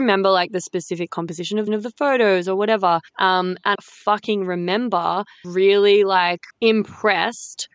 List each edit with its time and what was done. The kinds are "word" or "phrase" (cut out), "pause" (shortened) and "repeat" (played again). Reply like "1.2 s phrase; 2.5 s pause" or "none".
1.1 s word; 1.7 s repeat; 3.1 s pause; 3.7 s phrase; 5.4 s word; 6.5 s pause